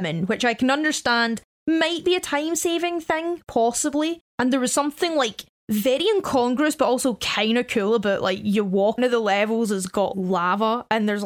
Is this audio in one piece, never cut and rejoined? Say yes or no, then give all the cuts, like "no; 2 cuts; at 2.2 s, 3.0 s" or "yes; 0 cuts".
no; 1 cut; at 9.0 s